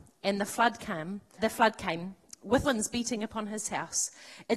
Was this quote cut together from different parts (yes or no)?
yes